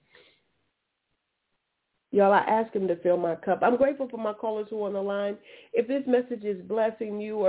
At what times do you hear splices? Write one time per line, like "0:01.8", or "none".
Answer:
none